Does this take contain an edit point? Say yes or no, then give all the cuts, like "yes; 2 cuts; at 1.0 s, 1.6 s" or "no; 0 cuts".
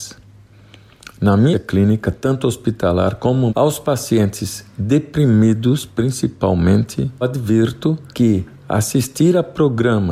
yes; 4 cuts; at 1.5 s, 3.5 s, 7.2 s, 8.1 s